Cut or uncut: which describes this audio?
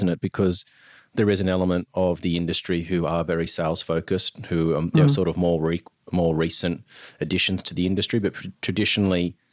uncut